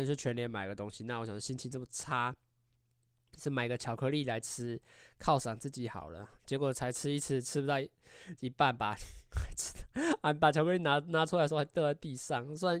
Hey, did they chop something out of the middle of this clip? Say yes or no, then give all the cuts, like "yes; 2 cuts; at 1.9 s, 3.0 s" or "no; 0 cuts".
yes; 1 cut; at 6.3 s